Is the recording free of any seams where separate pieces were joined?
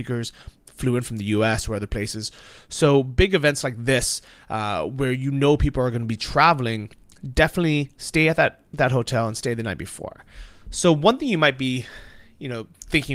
yes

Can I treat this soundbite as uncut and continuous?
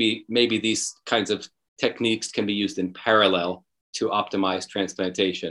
yes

